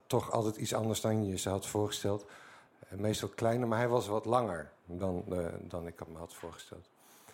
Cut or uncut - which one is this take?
uncut